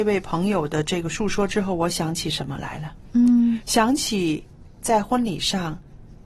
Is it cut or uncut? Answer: uncut